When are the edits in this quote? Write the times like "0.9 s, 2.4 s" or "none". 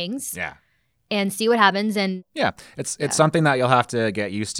none